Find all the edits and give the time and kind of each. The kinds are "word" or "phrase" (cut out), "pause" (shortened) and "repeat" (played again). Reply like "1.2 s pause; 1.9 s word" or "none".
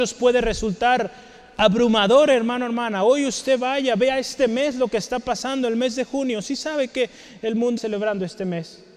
7.8 s word

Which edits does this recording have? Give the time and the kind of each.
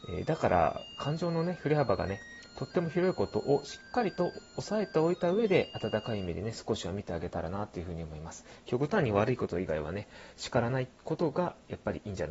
10.9 s pause

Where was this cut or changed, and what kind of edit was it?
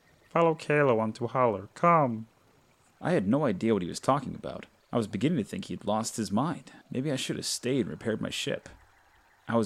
4.8 s pause; 6.8 s pause

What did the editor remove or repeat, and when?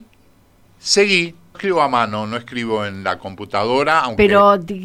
1.5 s phrase

